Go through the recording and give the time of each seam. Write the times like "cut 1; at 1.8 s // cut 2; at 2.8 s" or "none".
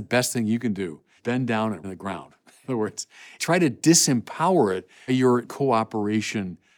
cut 1; at 1.2 s // cut 2; at 1.8 s // cut 3; at 2.6 s // cut 4; at 3.4 s // cut 5; at 5.1 s // cut 6; at 5.4 s